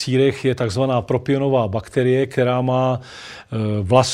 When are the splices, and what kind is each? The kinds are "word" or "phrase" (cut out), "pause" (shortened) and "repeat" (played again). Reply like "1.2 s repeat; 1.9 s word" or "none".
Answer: none